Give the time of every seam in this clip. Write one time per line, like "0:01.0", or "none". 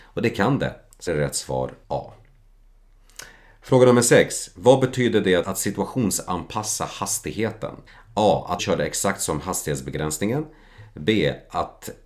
0:01.1
0:01.8
0:05.4
0:07.9
0:08.6